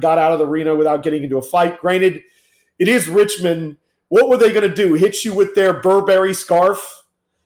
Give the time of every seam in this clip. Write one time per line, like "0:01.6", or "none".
none

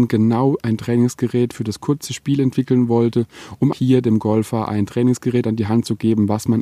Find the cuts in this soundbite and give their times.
0:03.7

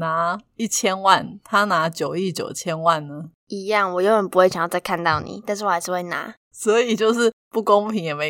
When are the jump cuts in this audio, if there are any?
0:03.4
0:06.4

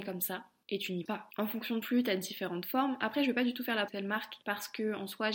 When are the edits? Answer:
0:01.1
0:01.8
0:03.9

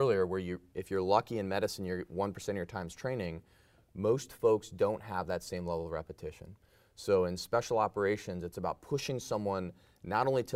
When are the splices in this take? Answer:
none

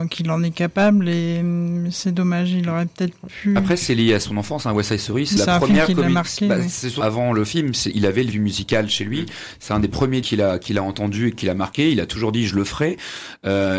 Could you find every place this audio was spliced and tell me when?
0:05.4
0:07.0
0:08.3
0:10.2

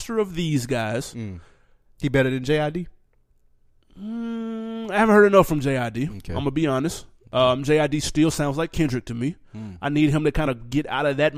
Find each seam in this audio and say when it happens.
none

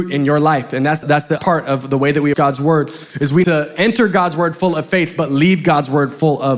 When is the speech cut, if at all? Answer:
0:01.0
0:01.4
0:02.3
0:03.4

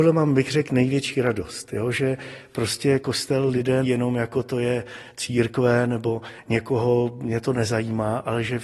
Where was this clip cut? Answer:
0:03.8

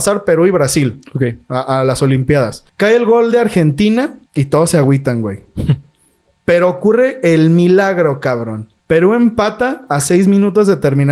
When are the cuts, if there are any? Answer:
0:02.7
0:04.3
0:08.8

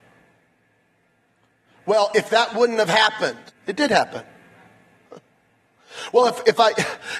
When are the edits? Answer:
0:03.5

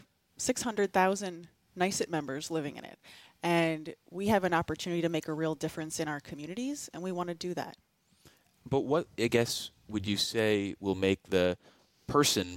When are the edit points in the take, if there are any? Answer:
none

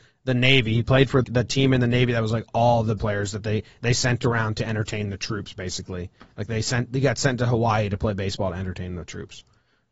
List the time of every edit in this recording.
0:01.2
0:03.0

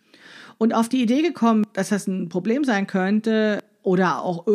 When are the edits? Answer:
none

